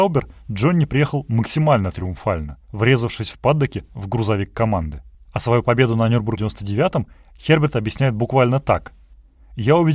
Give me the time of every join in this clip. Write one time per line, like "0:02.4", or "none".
0:02.6
0:05.1
0:06.4